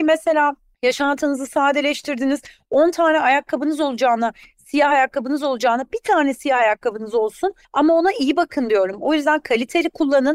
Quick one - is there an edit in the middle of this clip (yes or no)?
no